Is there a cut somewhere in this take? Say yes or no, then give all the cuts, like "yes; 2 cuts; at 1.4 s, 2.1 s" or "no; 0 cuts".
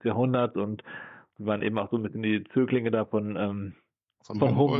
no; 0 cuts